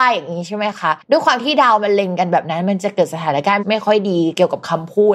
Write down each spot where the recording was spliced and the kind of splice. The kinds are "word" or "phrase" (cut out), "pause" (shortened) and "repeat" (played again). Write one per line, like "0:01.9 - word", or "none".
0:01.0 - pause

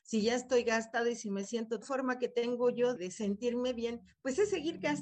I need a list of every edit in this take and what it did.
0:01.8 - phrase
0:03.0 - word

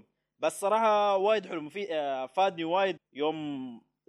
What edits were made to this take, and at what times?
0:03.0 - word

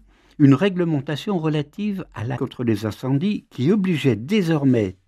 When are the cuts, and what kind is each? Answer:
0:02.4 - word

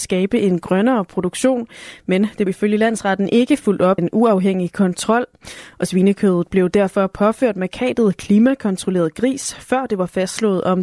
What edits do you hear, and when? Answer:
0:02.5 - word
0:04.0 - word

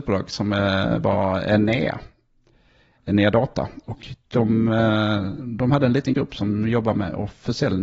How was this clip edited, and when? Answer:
0:04.2 - pause

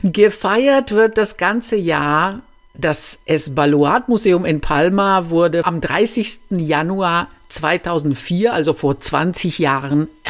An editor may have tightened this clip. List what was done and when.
none

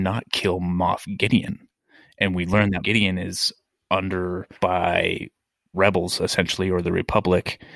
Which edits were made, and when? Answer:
0:02.8 - word
0:04.5 - word
0:05.7 - word

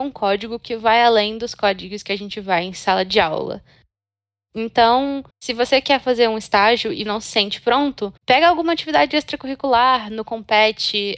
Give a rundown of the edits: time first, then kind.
0:05.3 - pause
0:07.1 - word
0:08.2 - pause

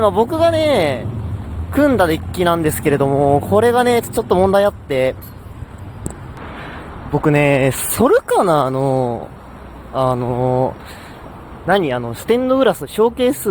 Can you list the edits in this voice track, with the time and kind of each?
none

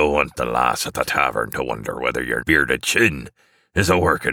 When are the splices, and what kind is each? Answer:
0:02.4 - word

